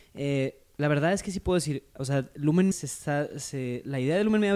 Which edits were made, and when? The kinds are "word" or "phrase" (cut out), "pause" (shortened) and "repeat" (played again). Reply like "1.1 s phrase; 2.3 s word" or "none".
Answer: 2.7 s word